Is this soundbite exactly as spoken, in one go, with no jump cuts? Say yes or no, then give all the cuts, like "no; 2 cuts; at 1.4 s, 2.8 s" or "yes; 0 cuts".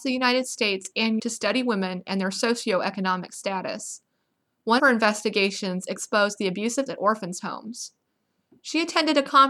no; 3 cuts; at 1.2 s, 4.8 s, 6.9 s